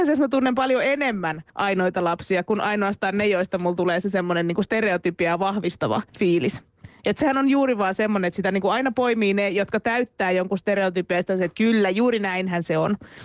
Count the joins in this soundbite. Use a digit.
2